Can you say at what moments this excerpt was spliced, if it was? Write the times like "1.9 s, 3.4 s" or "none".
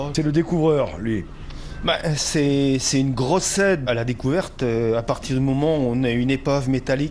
3.9 s